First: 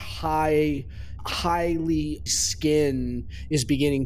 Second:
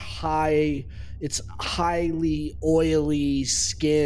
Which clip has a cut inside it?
first; 2 cuts; at 1.2 s, 2.3 s

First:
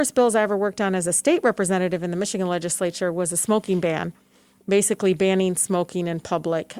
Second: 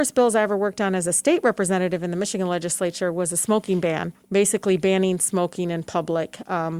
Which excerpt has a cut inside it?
second; 1 cut; at 4.2 s

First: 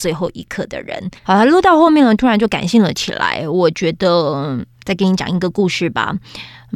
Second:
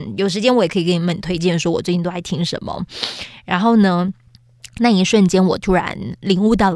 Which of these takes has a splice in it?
first; 1 cut; at 1.2 s

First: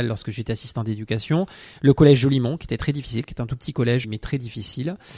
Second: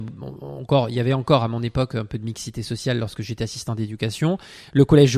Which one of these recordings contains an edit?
first; 1 cut; at 4.0 s

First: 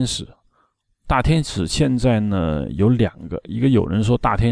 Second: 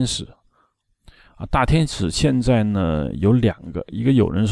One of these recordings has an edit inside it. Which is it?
first; 1 cut; at 1.0 s

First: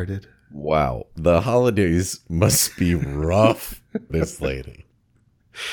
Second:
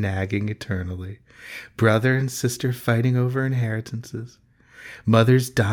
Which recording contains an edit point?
first; 1 cut; at 4.1 s

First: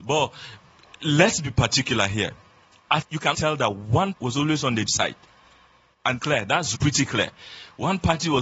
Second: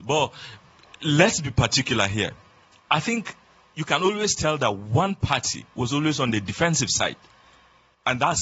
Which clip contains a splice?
first; 6 cuts; at 3.0 s, 3.3 s, 4.1 s, 4.9 s, 6.2 s, 6.7 s

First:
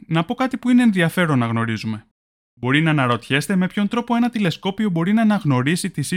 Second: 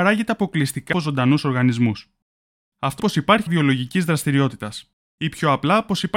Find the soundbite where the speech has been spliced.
second; 3 cuts; at 0.9 s, 3.0 s, 3.5 s

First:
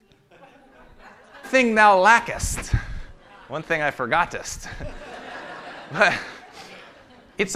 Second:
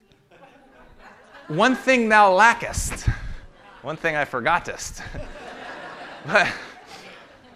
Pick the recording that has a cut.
first; 1 cut; at 1.4 s

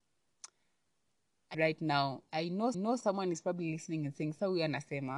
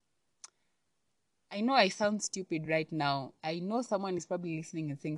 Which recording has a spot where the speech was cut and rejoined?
first; 2 cuts; at 1.5 s, 2.7 s

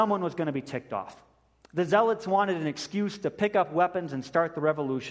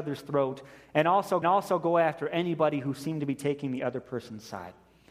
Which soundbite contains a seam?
second; 1 cut; at 1.4 s

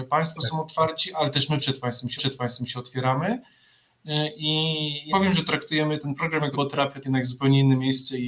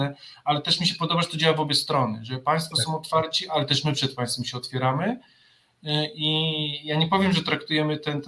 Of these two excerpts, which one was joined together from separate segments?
first; 5 cuts; at 2.2 s, 5.1 s, 6.0 s, 6.5 s, 7.0 s

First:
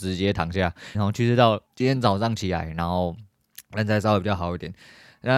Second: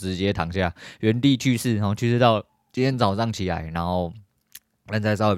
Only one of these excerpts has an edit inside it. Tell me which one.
first; 3 cuts; at 0.9 s, 1.7 s, 3.7 s

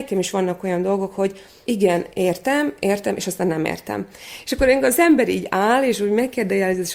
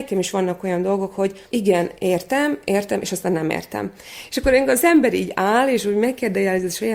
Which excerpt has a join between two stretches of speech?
second; 1 cut; at 1.4 s

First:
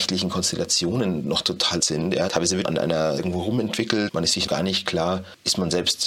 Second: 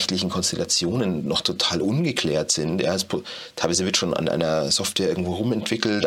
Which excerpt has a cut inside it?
first; 6 cuts; at 1.8 s, 2.3 s, 2.6 s, 3.2 s, 4.1 s, 4.5 s

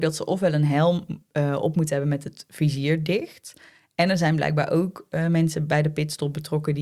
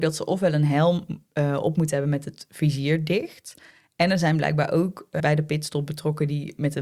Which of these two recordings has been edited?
second; 1 cut; at 5.2 s

